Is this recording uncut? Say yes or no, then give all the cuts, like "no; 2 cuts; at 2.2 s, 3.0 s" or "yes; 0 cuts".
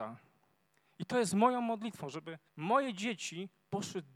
no; 1 cut; at 2.5 s